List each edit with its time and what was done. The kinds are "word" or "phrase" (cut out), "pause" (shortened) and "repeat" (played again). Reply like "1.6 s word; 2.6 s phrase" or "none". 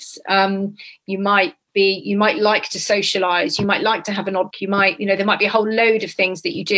4.5 s word